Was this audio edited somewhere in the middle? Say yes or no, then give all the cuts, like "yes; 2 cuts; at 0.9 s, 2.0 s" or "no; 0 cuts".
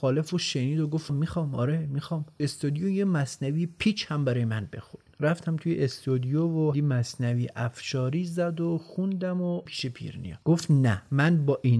yes; 5 cuts; at 1.1 s, 2.4 s, 6.7 s, 9.7 s, 10.4 s